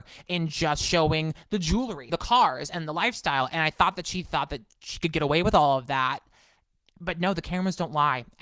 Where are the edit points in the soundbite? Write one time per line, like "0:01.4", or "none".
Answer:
0:02.1